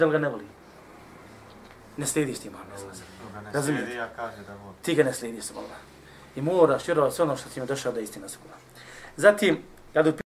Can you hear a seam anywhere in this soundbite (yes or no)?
no